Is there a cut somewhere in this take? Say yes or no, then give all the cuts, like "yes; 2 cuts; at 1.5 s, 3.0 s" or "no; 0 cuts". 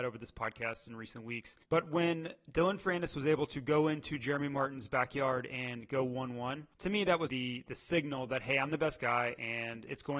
yes; 3 cuts; at 1.6 s, 6.7 s, 7.3 s